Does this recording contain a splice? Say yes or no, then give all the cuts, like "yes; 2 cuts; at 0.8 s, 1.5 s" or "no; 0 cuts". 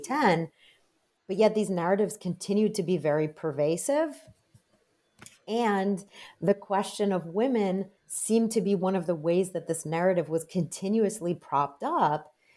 yes; 1 cut; at 8.0 s